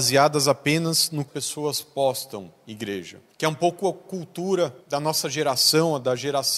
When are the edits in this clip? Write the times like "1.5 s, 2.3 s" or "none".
1.3 s, 3.3 s, 4.8 s